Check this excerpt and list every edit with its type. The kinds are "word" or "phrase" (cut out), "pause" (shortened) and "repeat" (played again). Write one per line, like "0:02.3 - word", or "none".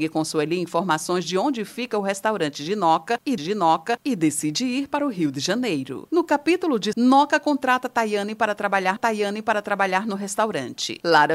0:03.4 - repeat
0:06.9 - word
0:09.0 - repeat